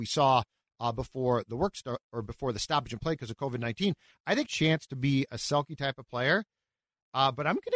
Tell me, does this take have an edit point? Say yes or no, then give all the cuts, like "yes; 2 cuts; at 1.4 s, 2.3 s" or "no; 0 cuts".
yes; 1 cut; at 4.4 s